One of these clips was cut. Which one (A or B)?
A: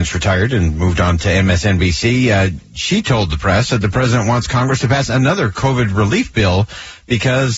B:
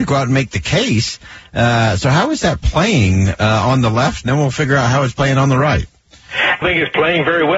B